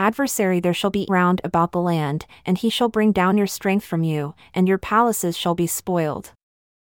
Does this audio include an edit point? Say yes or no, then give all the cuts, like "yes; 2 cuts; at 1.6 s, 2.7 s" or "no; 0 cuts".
yes; 1 cut; at 1.1 s